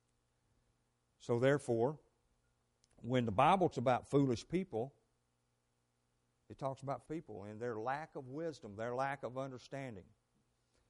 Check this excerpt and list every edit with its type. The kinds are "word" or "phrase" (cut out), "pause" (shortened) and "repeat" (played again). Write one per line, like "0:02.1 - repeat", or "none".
0:03.7 - word
0:07.1 - word